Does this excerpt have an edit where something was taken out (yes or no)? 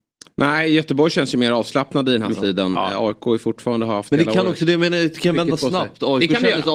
no